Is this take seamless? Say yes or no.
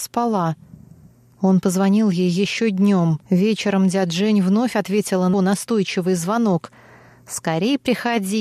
no